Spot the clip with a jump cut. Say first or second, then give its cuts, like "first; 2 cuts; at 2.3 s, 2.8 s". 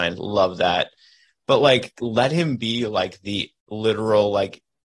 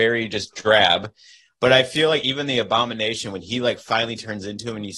first; 1 cut; at 3.6 s